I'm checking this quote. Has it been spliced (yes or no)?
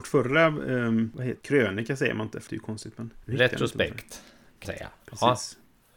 yes